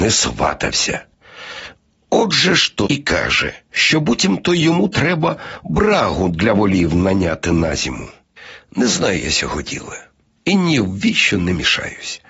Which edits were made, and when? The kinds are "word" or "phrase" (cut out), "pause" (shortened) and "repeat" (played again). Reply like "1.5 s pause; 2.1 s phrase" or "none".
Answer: 2.9 s word

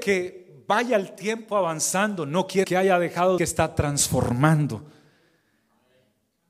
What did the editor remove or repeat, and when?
2.6 s word; 3.4 s phrase

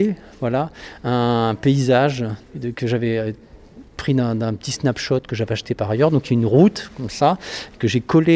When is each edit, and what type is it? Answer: 2.4 s word; 3.9 s pause

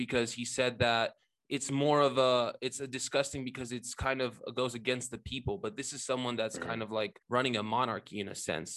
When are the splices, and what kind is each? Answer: 7.2 s pause

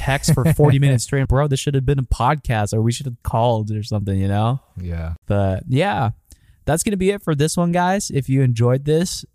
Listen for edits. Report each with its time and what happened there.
1.2 s word; 3.2 s word; 5.2 s pause

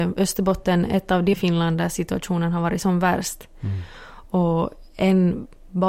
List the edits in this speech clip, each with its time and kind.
1.3 s word

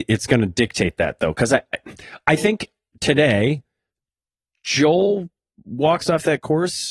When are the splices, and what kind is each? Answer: none

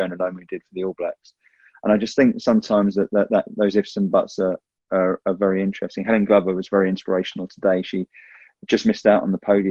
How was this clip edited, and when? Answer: none

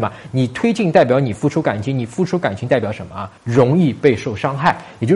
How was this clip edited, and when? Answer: 3.4 s pause

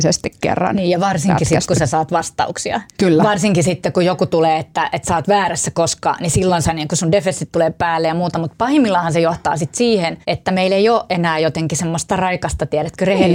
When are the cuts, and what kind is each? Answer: 2.9 s pause; 10.2 s pause

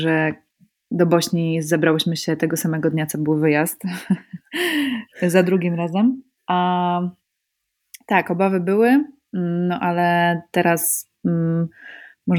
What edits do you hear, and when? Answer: 6.4 s pause

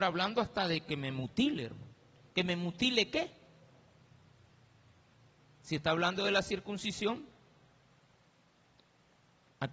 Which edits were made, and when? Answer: none

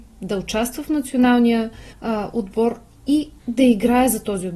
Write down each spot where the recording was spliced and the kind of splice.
1.9 s pause; 3.4 s pause

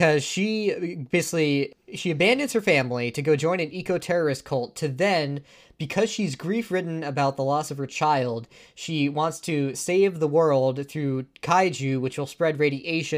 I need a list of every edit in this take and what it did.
none

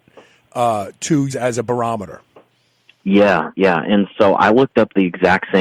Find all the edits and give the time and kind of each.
1.3 s word

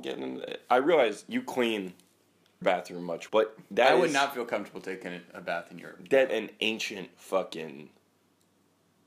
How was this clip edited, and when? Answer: 2.6 s word; 3.3 s word; 6.3 s word

